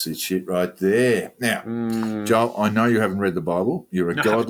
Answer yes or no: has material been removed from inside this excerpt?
no